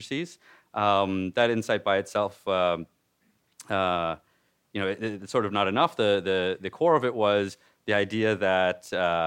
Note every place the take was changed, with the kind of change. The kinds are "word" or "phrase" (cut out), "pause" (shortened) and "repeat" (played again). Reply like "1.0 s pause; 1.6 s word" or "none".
6.6 s word